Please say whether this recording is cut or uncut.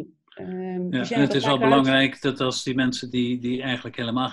uncut